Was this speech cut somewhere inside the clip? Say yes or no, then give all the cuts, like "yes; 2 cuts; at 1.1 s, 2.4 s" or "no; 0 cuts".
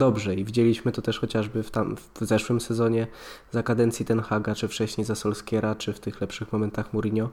no; 0 cuts